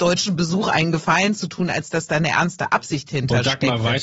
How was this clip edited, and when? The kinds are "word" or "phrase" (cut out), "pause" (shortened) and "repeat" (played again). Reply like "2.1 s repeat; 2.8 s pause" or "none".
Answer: none